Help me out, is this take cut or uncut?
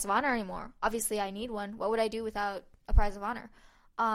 uncut